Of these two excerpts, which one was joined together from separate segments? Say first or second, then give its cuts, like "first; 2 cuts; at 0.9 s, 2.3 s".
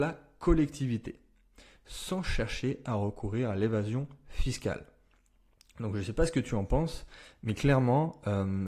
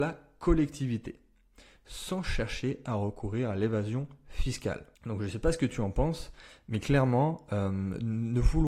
second; 1 cut; at 4.9 s